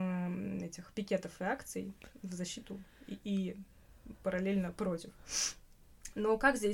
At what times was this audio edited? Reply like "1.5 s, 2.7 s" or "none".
none